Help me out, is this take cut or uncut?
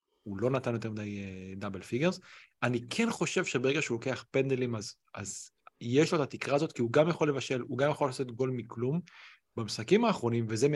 uncut